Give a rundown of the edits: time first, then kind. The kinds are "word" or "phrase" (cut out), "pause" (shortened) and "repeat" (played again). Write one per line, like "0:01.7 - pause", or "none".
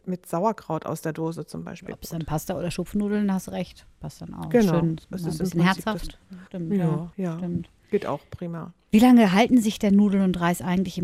0:06.5 - pause
0:07.1 - pause